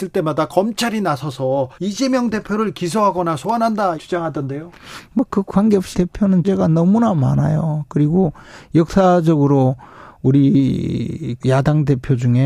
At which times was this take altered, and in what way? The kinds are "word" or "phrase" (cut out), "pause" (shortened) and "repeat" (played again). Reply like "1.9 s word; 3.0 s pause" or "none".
1.7 s pause; 3.9 s word; 5.9 s word; 6.4 s word; 11.4 s word